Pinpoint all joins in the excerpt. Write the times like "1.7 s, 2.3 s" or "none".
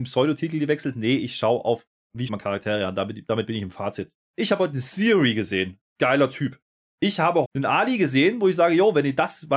2.3 s, 7.4 s